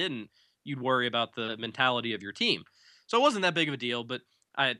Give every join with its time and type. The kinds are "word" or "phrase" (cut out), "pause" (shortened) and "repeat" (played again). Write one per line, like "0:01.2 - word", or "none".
none